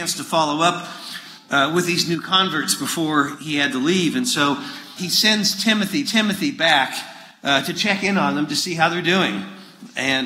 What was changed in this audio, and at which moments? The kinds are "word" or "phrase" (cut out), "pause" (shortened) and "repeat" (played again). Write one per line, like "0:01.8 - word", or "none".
0:05.0 - word
0:06.0 - repeat